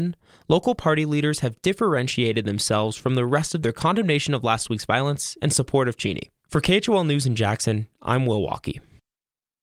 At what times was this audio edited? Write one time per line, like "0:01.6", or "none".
0:03.6
0:06.4